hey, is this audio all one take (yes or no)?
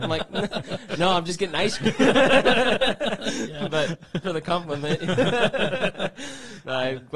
no